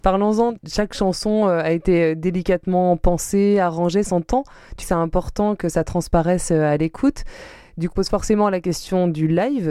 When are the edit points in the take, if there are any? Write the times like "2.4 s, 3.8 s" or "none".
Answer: 4.0 s, 4.8 s, 7.9 s